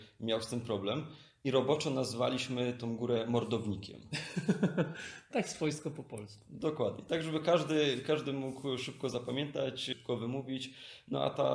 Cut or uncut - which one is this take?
uncut